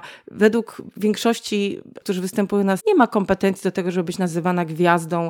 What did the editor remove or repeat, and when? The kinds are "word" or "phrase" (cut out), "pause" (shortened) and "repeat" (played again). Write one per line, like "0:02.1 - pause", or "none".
0:02.0 - word
0:02.8 - word